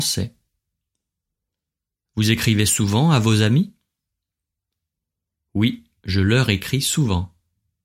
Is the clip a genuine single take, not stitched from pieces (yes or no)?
yes